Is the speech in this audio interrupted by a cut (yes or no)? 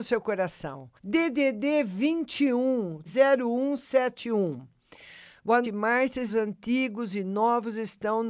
yes